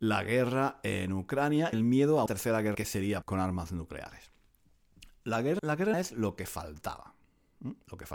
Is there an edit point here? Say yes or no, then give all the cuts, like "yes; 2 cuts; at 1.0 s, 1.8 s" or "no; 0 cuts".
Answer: yes; 6 cuts; at 1.7 s, 2.3 s, 2.7 s, 3.2 s, 5.6 s, 5.9 s